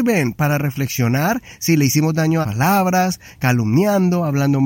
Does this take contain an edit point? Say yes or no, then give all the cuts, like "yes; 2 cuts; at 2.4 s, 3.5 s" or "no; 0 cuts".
yes; 1 cut; at 2.4 s